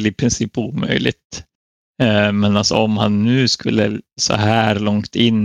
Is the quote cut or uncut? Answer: uncut